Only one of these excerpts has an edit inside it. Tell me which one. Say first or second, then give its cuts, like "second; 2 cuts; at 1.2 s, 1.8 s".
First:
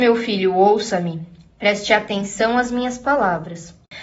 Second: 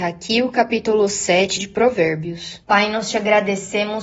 second; 2 cuts; at 1.6 s, 2.6 s